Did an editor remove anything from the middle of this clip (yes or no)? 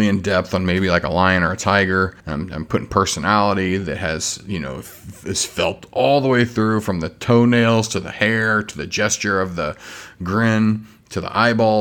yes